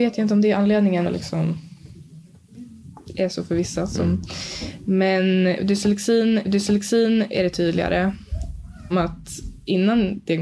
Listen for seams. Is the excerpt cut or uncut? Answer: cut